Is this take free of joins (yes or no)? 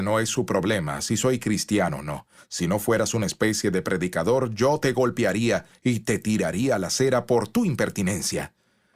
yes